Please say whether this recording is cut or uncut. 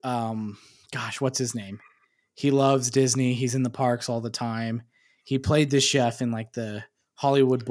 uncut